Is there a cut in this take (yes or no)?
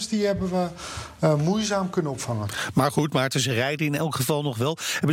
no